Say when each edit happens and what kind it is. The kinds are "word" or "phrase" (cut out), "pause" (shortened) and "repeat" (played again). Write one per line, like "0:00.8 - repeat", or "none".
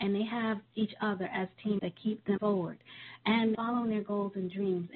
0:01.8 - word
0:02.4 - word
0:03.5 - word